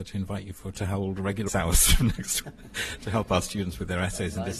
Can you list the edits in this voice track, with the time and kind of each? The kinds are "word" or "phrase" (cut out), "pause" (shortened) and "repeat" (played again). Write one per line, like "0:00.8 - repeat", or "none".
0:01.5 - word
0:02.4 - word

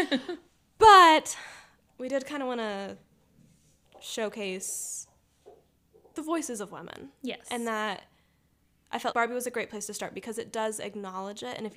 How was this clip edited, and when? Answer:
0:09.1 - word

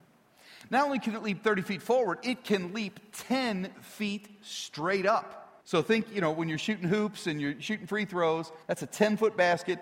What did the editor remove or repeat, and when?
0:05.6 - pause
0:08.6 - pause

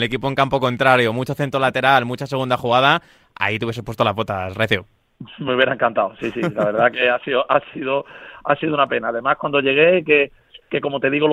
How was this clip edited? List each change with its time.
none

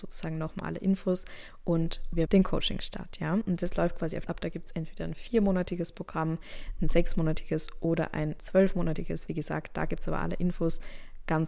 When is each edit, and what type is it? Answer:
0:02.3 - word
0:04.3 - phrase

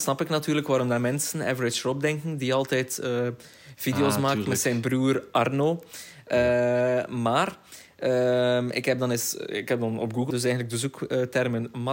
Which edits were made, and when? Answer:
0:10.3 - word

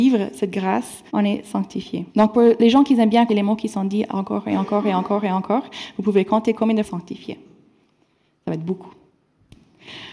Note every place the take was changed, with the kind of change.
0:01.1 - pause
0:02.1 - pause
0:03.3 - word
0:06.8 - phrase

